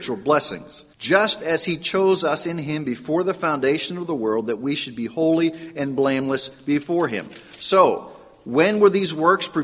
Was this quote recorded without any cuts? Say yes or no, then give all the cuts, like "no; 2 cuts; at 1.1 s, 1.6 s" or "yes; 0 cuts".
no; 1 cut; at 0.9 s